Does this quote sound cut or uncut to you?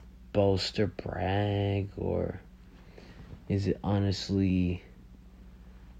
uncut